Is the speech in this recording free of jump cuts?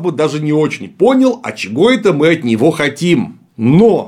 yes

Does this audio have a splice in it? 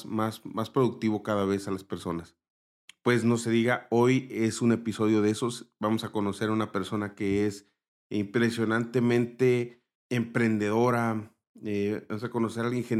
no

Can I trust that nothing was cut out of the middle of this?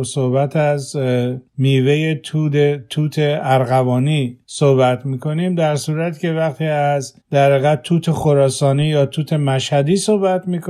no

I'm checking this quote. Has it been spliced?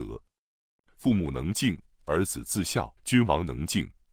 yes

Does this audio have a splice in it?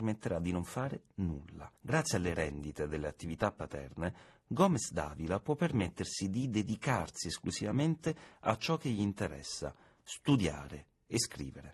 yes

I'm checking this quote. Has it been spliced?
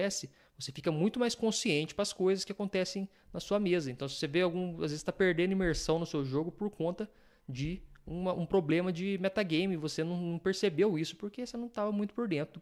no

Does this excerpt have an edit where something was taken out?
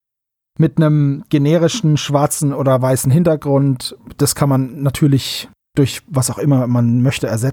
yes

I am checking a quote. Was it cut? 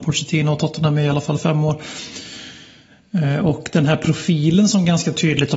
no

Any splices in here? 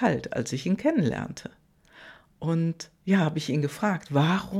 no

